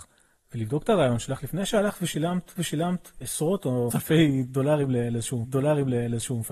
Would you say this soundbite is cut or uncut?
cut